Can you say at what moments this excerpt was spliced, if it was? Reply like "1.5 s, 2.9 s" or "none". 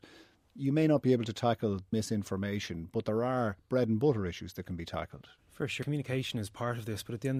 1.9 s, 5.4 s, 5.8 s